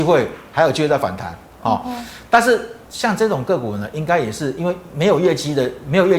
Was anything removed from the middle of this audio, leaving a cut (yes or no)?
yes